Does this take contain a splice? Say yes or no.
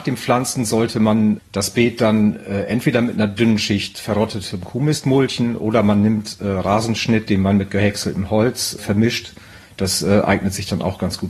yes